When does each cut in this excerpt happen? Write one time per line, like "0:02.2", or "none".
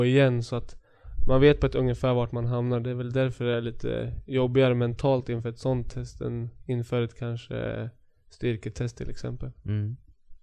none